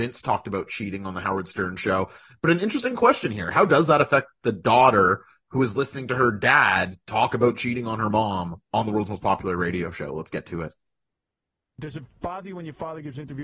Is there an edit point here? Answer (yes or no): no